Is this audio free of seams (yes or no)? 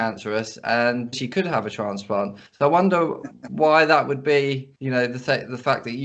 no